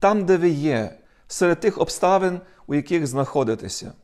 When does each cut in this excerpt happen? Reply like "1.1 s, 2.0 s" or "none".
1.0 s